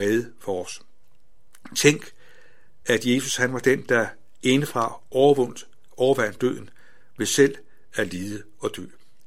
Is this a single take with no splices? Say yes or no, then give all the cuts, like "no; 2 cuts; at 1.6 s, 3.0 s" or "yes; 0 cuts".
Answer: yes; 0 cuts